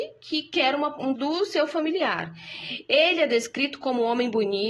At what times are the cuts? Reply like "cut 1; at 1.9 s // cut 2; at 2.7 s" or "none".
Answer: cut 1; at 1.2 s